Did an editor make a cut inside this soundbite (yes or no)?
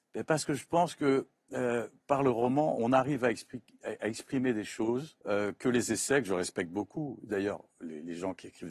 yes